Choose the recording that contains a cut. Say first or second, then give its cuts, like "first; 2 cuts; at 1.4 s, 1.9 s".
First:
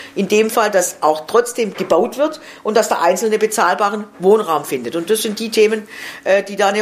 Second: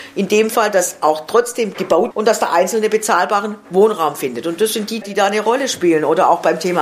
second; 2 cuts; at 2.1 s, 5.0 s